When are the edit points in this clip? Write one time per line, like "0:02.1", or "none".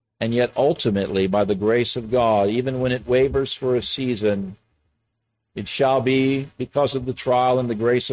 none